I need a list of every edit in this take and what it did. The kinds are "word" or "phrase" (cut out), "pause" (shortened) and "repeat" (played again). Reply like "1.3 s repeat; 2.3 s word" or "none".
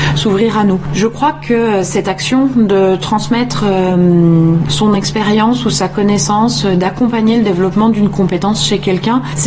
none